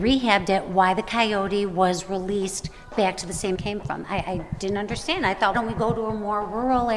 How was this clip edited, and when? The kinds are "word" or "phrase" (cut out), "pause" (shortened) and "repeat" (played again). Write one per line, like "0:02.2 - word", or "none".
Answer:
0:03.5 - phrase
0:05.5 - phrase